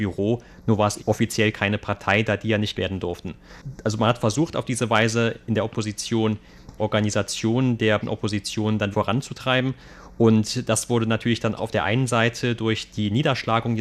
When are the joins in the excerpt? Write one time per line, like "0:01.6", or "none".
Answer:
0:01.0
0:02.7
0:06.8
0:08.0
0:08.9
0:11.6